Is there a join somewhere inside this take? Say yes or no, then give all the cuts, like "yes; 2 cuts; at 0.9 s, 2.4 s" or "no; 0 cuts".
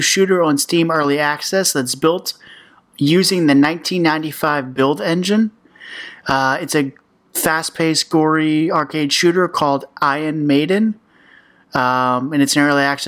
no; 0 cuts